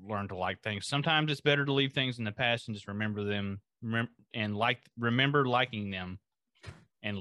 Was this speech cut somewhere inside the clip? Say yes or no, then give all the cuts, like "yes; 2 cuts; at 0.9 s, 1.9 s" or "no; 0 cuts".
no; 0 cuts